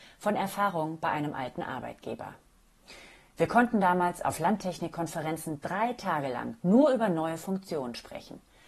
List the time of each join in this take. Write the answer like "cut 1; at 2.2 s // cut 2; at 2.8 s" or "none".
none